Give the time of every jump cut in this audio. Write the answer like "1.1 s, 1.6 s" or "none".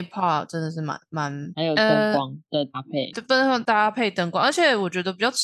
3.1 s